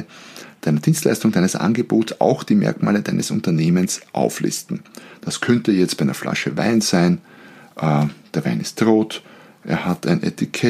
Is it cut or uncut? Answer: uncut